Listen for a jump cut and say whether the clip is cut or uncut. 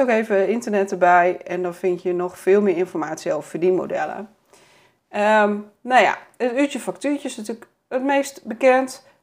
uncut